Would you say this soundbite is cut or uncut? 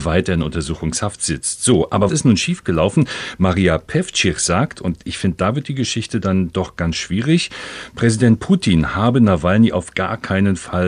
cut